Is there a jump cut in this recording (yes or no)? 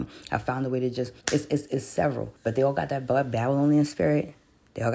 yes